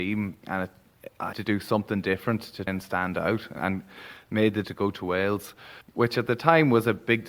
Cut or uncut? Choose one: cut